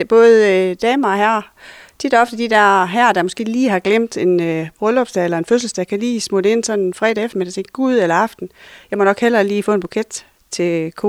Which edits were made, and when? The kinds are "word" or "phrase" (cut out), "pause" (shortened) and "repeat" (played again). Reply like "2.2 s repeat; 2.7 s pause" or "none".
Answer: none